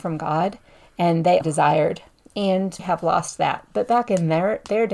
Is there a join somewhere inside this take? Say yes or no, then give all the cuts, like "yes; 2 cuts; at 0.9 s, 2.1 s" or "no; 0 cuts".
yes; 2 cuts; at 1.4 s, 2.8 s